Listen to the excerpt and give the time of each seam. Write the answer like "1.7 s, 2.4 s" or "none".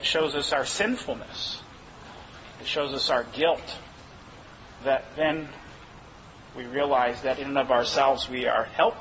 4.8 s